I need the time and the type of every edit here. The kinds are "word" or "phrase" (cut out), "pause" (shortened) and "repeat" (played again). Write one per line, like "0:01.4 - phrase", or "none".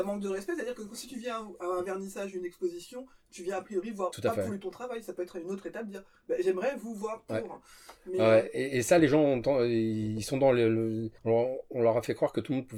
0:04.1 - phrase
0:04.6 - word
0:11.2 - pause